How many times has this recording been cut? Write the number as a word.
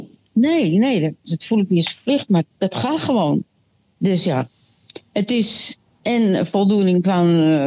one